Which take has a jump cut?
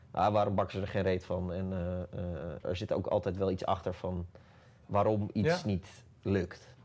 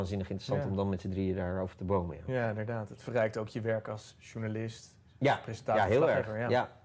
first; 1 cut; at 2.6 s

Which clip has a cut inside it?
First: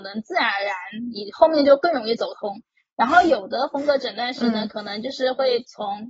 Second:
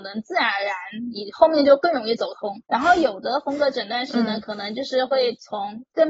second; 1 cut; at 2.7 s

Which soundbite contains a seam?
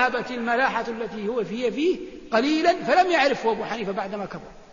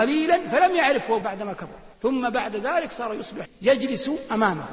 second; 3 cuts; at 1.2 s, 1.9 s, 3.5 s

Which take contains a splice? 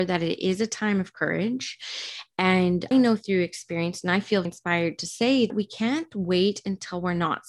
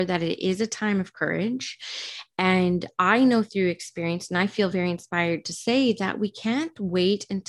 first; 3 cuts; at 2.9 s, 4.4 s, 5.5 s

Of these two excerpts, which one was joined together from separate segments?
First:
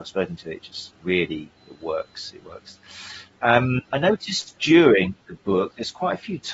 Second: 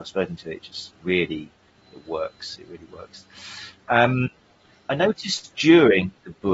first; 3 cuts; at 1.6 s, 2.4 s, 3.9 s

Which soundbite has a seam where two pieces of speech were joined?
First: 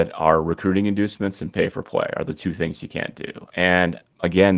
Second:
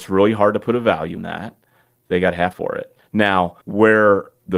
second; 3 cuts; at 1.2 s, 2.5 s, 3.6 s

